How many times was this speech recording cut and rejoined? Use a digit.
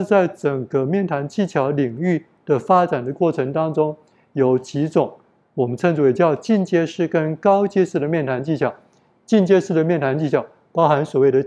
0